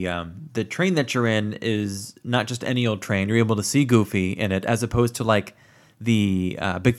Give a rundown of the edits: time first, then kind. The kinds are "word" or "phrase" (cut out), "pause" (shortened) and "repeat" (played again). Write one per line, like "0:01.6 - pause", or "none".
none